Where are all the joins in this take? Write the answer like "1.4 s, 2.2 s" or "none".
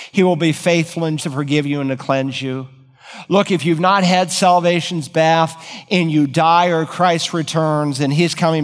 1.2 s